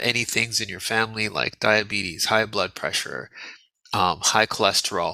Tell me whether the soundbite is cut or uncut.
uncut